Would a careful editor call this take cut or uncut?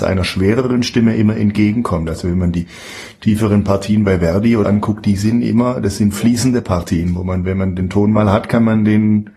cut